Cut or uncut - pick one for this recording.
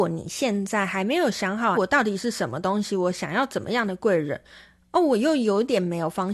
cut